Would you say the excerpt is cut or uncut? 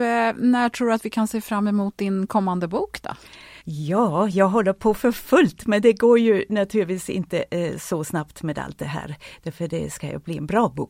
cut